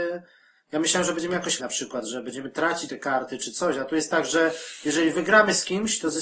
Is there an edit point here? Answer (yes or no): yes